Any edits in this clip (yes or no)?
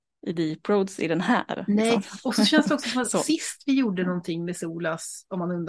no